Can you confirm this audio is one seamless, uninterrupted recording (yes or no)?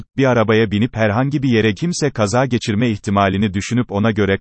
no